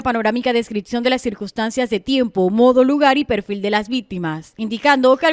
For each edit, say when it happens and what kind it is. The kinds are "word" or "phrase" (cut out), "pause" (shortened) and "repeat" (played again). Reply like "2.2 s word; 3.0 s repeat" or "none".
none